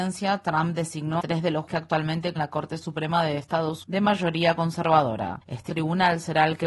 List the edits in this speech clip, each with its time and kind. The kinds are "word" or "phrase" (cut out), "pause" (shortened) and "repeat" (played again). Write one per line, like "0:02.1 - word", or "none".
0:01.2 - word
0:01.7 - word
0:02.4 - word
0:03.8 - word
0:05.7 - word

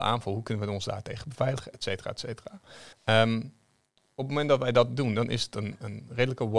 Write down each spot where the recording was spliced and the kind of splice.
0:02.9 - pause

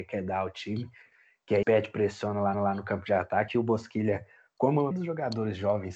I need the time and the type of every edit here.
0:01.6 - word
0:02.5 - repeat
0:04.9 - word

